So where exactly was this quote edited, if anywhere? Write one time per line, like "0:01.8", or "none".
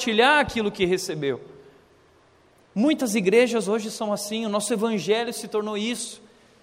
none